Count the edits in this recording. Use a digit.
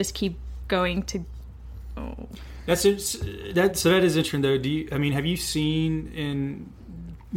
0